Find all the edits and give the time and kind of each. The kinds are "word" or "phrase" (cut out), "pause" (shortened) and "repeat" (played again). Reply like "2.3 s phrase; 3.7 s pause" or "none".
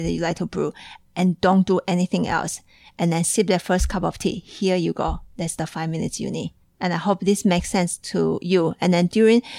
none